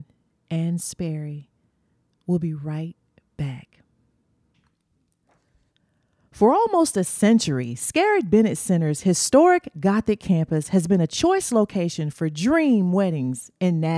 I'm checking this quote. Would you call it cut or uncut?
uncut